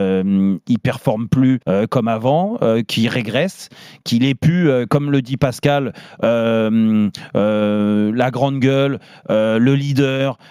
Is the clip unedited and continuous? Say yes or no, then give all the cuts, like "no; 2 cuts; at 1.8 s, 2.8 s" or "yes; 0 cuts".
no; 1 cut; at 1.6 s